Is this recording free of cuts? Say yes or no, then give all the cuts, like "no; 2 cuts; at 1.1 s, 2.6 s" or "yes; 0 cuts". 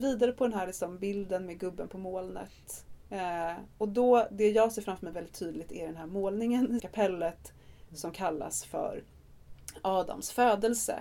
no; 1 cut; at 6.8 s